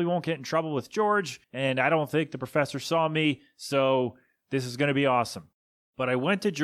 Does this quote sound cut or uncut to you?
cut